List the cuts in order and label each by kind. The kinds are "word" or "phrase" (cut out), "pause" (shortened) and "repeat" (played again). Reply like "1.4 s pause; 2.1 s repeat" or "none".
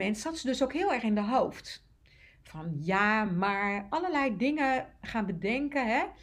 none

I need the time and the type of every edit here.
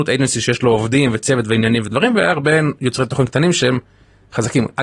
none

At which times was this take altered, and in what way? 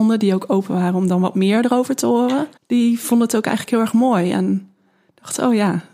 2.6 s pause

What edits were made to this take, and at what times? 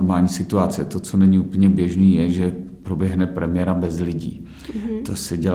none

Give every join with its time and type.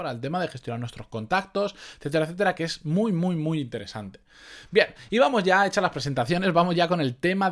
none

